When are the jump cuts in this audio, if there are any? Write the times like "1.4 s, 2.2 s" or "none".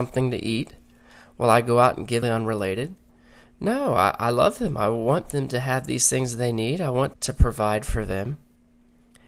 2.2 s, 7.1 s